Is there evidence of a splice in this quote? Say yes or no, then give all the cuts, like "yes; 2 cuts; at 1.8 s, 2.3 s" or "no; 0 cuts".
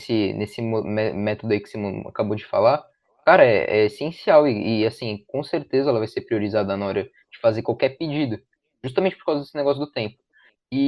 no; 0 cuts